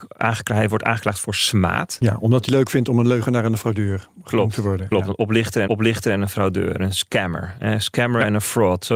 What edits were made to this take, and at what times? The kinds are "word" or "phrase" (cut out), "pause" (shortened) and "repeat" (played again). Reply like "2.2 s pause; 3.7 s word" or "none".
2.5 s phrase; 5.7 s repeat